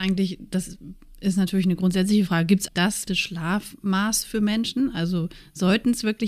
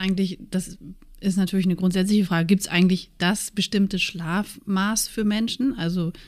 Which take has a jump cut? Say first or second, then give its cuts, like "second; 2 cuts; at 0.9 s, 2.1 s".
first; 2 cuts; at 2.7 s, 3.1 s